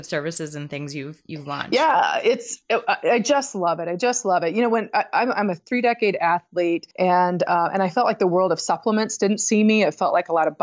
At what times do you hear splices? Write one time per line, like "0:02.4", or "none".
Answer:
0:06.9